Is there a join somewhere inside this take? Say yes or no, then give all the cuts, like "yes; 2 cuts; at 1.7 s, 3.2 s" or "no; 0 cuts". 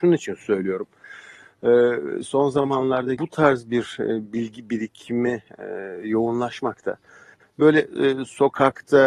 yes; 1 cut; at 3.2 s